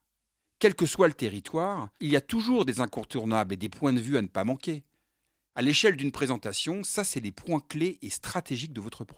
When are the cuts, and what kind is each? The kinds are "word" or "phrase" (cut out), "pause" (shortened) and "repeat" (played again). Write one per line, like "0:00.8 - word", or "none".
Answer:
none

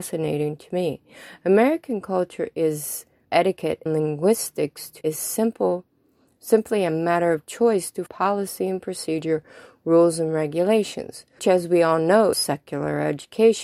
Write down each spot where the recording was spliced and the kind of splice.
0:03.2 - word
0:03.9 - word
0:05.0 - word
0:08.1 - word
0:11.4 - word
0:12.3 - word

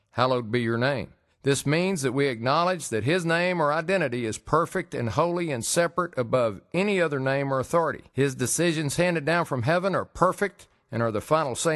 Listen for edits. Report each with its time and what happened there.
0:01.3 - pause
0:08.1 - pause

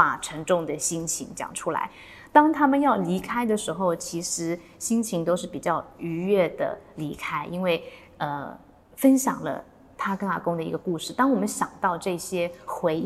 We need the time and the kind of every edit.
none

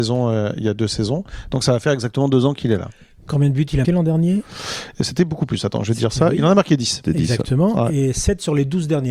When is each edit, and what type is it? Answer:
0:03.8 - word

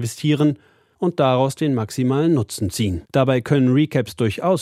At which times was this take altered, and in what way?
0:03.1 - pause

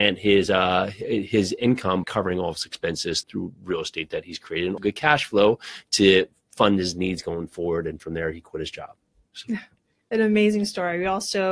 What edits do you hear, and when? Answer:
0:02.0 - word
0:03.2 - word
0:04.8 - word

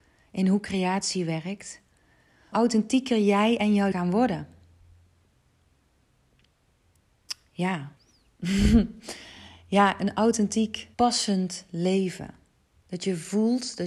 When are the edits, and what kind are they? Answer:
0:02.5 - word
0:03.9 - word
0:08.0 - pause
0:10.9 - pause

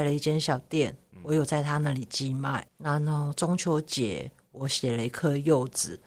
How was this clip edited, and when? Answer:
0:02.7 - word

